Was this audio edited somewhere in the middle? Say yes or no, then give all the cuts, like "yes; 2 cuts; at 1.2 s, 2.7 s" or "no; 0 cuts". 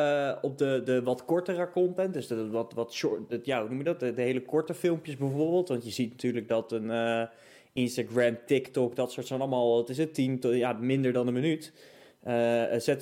no; 0 cuts